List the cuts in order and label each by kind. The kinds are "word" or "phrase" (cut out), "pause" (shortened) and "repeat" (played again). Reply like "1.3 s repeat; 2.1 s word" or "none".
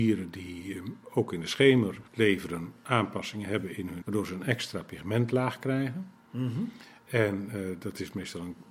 2.1 s pause; 4.0 s word